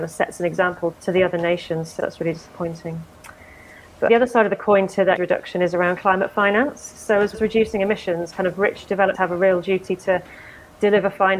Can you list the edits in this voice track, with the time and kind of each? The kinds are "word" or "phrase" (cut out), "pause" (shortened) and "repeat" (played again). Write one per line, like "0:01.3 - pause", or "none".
0:00.9 - word
0:02.0 - word
0:04.1 - word
0:05.2 - word
0:07.3 - word
0:09.1 - word